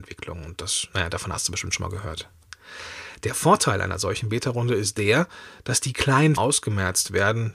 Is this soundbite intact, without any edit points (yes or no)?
no